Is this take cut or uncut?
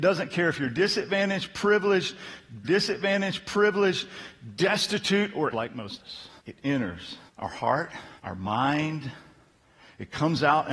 cut